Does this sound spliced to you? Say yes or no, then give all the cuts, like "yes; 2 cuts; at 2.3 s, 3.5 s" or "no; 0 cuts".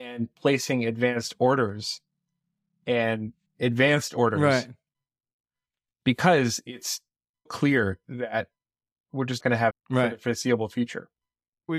yes; 4 cuts; at 3.5 s, 7.5 s, 9.4 s, 9.7 s